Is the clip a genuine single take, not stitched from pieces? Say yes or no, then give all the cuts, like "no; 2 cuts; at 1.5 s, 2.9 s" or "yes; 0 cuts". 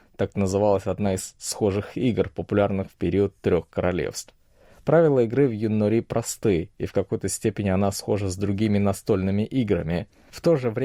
yes; 0 cuts